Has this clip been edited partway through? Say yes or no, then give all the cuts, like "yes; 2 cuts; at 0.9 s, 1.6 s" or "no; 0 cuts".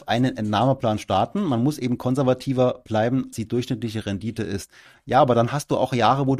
yes; 1 cut; at 3.3 s